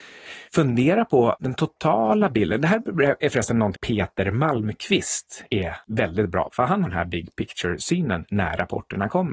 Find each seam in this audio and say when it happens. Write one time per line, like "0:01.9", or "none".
0:01.4
0:03.7
0:06.5
0:06.9